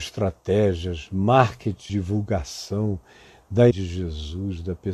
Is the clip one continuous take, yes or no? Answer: no